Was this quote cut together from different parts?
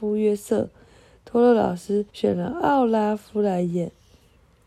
yes; 1 cut; at 2.1 s

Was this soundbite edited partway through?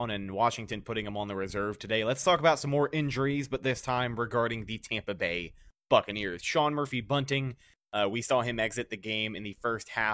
no; 0 cuts

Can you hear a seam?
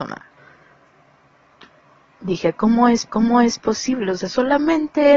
yes; 1 cut; at 3.1 s

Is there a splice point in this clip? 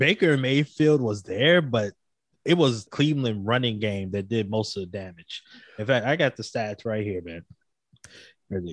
yes; 1 cut; at 2.9 s

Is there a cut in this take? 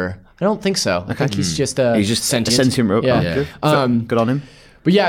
no; 0 cuts

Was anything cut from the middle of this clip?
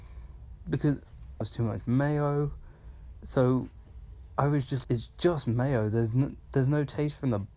yes; 2 cuts; at 1.4 s, 4.8 s

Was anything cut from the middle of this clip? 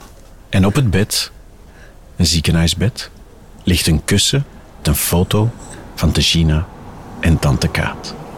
yes; 2 cuts; at 4.8 s, 6.1 s

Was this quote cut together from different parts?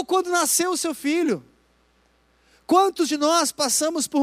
no; 0 cuts

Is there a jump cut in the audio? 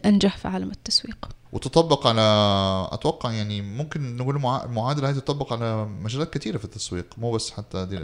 yes; 1 cut; at 1.4 s

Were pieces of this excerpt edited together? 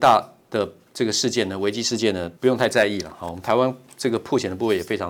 yes; 1 cut; at 2.4 s

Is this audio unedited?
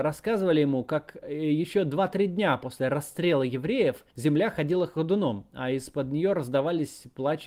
no; 1 cut; at 4.1 s

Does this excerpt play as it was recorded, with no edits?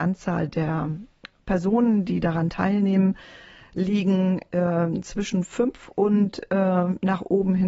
yes; 0 cuts

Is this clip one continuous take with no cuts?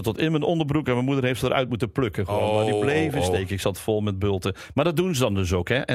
yes; 0 cuts

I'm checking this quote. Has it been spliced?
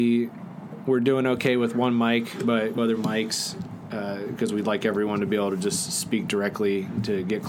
yes; 1 cut; at 2.8 s

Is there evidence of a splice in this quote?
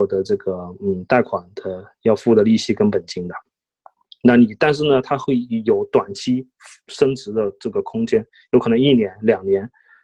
no; 0 cuts

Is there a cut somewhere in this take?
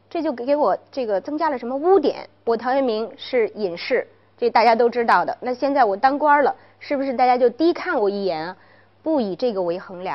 no; 0 cuts

